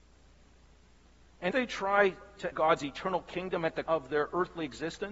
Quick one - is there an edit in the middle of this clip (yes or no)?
yes